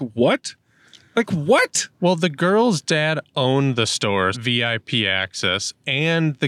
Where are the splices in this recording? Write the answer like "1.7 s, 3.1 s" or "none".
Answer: 4.3 s